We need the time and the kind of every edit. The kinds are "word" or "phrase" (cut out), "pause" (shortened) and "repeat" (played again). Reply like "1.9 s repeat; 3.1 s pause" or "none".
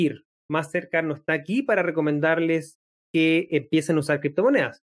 none